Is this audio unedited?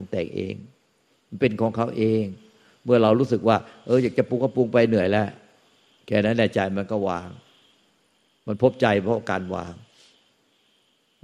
yes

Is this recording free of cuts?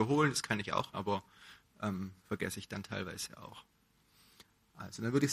no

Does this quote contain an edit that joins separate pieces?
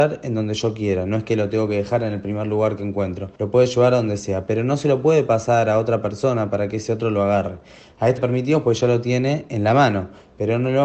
yes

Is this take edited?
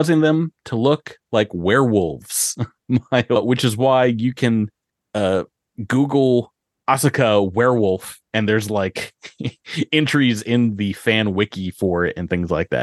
no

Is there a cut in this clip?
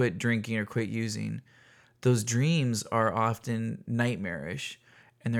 no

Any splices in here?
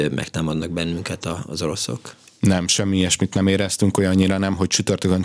no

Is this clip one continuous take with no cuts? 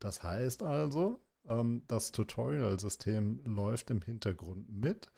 yes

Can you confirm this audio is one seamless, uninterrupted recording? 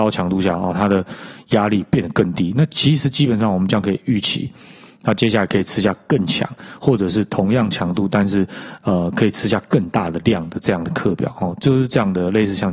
yes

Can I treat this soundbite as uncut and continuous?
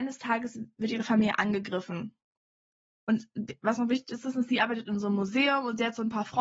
yes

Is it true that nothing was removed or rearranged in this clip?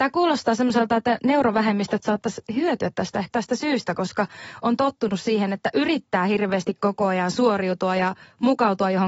no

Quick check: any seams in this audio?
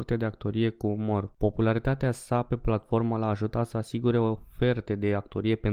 no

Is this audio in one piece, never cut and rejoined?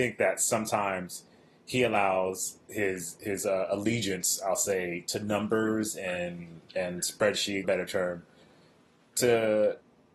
no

